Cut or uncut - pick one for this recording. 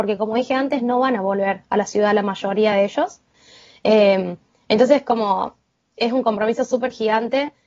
uncut